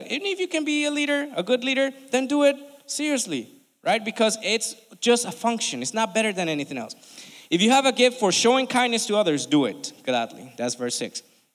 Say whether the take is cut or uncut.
uncut